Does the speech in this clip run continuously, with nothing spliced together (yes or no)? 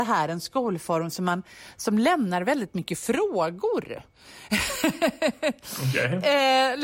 yes